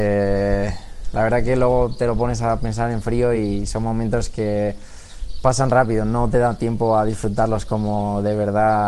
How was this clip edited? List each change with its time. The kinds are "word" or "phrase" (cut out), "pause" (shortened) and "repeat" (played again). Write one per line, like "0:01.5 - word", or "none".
none